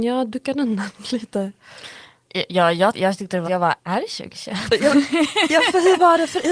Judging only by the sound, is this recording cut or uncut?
cut